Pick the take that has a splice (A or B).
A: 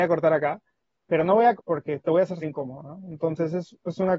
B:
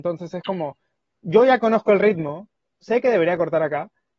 A